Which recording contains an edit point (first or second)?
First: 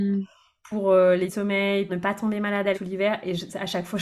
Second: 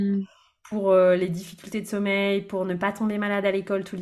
first